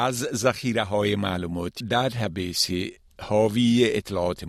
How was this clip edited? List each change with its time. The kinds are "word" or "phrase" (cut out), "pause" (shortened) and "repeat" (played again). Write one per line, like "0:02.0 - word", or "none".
0:01.8 - word